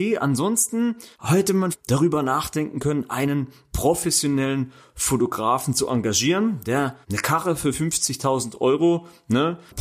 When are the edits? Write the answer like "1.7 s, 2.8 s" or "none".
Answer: 1.1 s, 1.7 s, 7.0 s